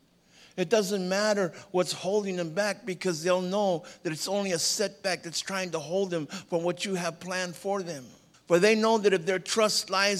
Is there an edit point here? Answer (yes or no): yes